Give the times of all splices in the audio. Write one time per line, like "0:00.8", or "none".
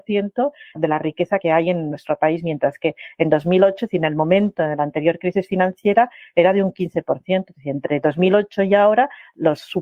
none

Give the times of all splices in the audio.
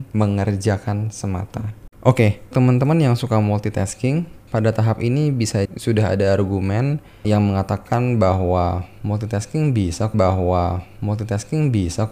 0:01.9
0:02.5
0:05.6
0:10.1

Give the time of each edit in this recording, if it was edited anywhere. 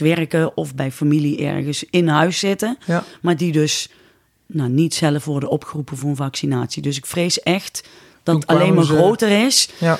none

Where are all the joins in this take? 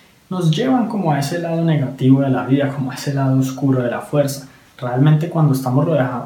none

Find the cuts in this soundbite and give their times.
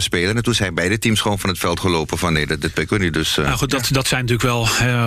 none

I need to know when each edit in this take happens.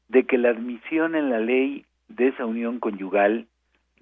0:01.9

